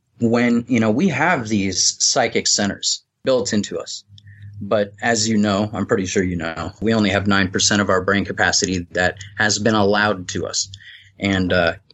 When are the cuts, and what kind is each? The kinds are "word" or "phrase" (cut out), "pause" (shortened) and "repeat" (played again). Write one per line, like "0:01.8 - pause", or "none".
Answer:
none